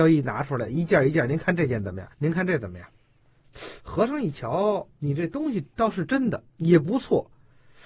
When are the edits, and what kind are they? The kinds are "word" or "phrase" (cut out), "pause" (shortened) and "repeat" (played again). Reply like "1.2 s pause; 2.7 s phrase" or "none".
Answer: 2.1 s pause; 5.7 s pause; 6.5 s pause